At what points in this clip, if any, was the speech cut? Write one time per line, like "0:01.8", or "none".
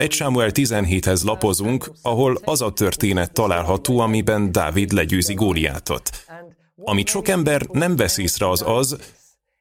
none